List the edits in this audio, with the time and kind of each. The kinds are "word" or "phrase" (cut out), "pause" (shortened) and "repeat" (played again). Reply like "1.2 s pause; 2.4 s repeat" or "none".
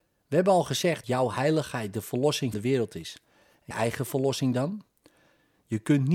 1.0 s word; 2.5 s word; 3.7 s word

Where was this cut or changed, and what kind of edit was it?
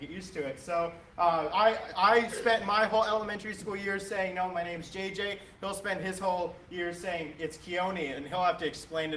none

